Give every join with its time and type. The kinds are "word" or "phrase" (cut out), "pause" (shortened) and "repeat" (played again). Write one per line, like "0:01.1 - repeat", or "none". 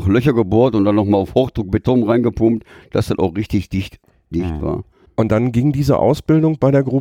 none